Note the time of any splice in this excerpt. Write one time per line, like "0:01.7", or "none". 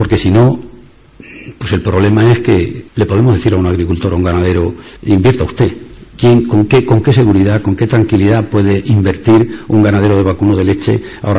0:02.9
0:05.0
0:06.1